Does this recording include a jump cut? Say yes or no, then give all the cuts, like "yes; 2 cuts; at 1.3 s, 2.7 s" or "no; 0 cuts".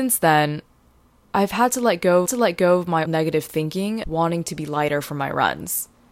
yes; 3 cuts; at 2.3 s, 3.1 s, 4.0 s